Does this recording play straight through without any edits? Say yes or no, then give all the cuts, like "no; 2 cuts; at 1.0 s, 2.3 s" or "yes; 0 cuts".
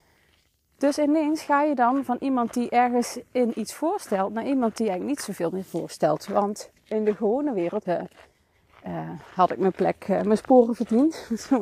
no; 2 cuts; at 6.8 s, 7.8 s